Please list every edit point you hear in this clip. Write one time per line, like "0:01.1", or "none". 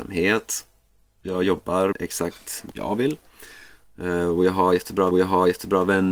0:01.9
0:02.7
0:05.1